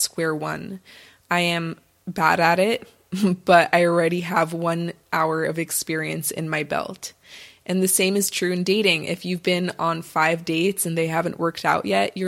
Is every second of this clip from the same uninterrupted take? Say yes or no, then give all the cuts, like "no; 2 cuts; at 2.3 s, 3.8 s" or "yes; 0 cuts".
yes; 0 cuts